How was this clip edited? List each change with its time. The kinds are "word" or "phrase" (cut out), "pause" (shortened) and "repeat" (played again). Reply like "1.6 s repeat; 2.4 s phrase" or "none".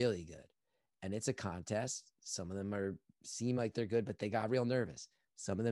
none